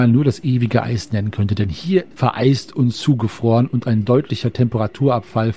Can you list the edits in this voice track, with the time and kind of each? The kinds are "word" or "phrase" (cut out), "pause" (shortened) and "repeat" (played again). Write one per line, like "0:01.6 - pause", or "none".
0:02.1 - phrase